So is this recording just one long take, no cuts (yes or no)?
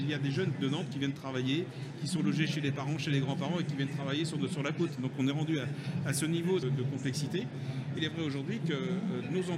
no